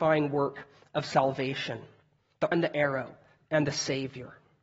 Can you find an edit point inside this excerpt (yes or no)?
yes